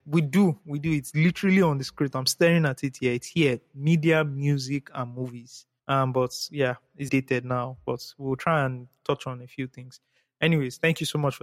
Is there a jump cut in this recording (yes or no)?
yes